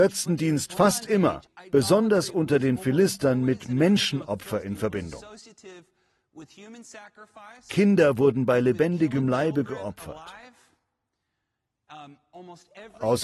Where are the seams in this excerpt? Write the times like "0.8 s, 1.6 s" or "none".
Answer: none